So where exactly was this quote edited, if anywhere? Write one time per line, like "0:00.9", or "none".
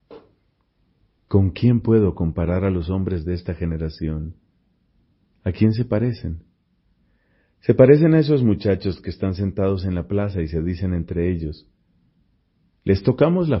none